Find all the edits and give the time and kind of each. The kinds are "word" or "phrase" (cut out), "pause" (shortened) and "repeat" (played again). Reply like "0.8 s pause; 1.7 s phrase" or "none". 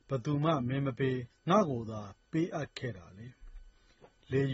1.3 s pause